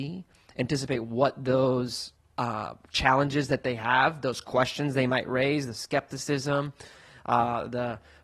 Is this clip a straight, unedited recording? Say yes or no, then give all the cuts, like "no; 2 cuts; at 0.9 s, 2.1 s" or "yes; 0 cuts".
no; 1 cut; at 2.2 s